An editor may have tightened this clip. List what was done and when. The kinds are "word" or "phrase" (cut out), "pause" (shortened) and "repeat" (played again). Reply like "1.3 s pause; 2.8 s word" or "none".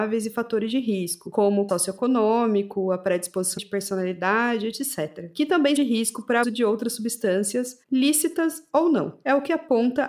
1.7 s word; 3.6 s phrase; 5.8 s phrase; 6.4 s word; 7.8 s pause